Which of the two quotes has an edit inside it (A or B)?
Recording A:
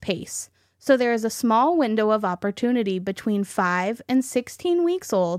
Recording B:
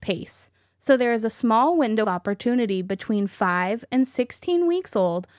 B